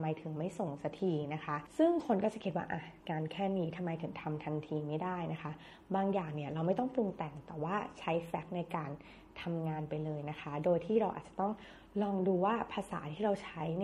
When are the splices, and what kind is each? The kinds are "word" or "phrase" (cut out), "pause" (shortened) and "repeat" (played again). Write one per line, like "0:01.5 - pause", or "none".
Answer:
0:03.0 - pause

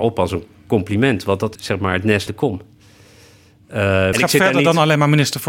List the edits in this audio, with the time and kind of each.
0:01.5 - word
0:02.3 - word
0:04.1 - word

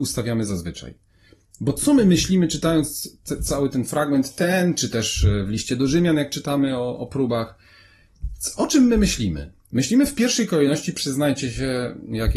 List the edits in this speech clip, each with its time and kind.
none

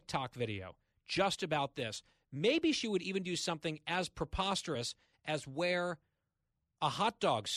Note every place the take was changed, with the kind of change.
none

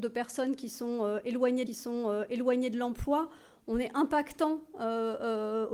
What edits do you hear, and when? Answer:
0:01.7 - repeat

